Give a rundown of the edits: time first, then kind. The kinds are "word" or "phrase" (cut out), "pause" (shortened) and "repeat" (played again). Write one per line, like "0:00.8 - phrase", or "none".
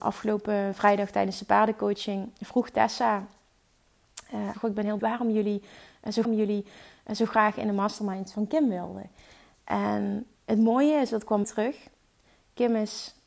0:04.5 - phrase
0:05.0 - word
0:06.2 - repeat
0:08.3 - word
0:10.4 - pause
0:11.4 - phrase